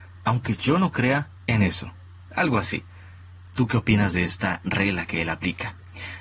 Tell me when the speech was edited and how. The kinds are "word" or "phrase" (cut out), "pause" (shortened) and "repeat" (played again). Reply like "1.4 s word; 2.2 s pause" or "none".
none